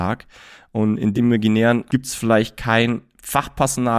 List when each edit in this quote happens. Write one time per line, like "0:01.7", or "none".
0:01.1
0:01.9

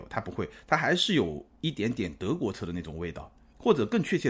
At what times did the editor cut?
none

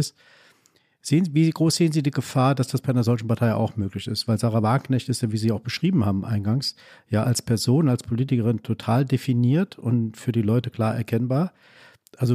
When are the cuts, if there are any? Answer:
none

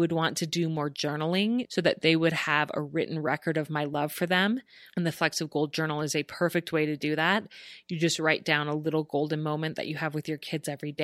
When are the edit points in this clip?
none

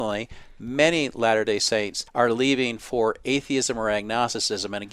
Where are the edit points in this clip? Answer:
0:02.1

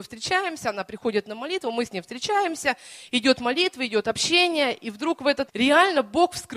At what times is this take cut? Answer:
0:05.5

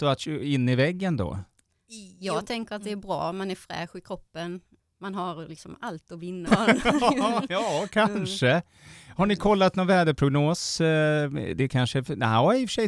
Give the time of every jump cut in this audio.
0:06.5

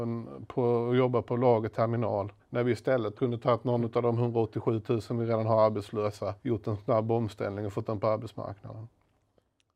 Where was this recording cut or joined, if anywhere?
0:02.4
0:03.1
0:06.4
0:07.9

